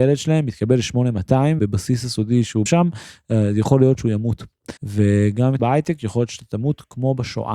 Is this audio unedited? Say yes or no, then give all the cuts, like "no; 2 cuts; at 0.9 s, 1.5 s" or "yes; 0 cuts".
no; 4 cuts; at 1.6 s, 2.7 s, 4.8 s, 5.6 s